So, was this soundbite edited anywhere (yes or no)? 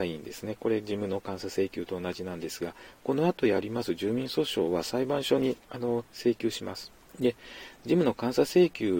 yes